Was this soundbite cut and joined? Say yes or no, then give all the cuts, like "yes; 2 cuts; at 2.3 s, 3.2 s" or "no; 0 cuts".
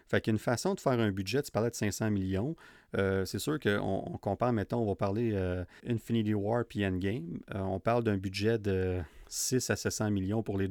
yes; 1 cut; at 5.8 s